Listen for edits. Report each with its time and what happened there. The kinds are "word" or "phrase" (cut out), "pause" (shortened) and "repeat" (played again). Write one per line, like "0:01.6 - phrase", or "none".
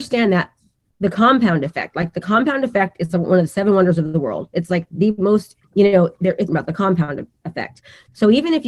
0:05.6 - pause
0:06.5 - phrase

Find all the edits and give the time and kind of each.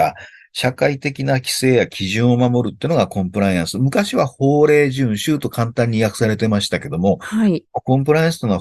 none

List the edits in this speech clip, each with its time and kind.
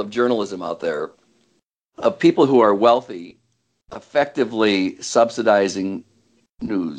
none

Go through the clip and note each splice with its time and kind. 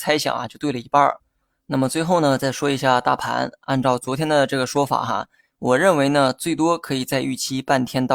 none

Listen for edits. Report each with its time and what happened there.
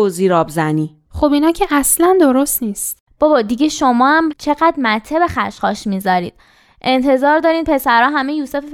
none

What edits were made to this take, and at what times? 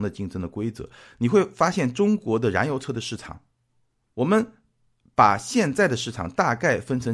none

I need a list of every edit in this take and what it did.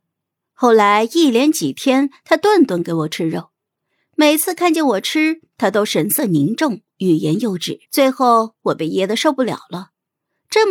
0:07.8 - pause

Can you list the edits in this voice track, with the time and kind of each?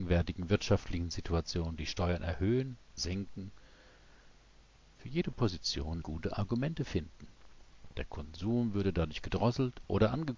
0:03.0 - word
0:06.0 - phrase

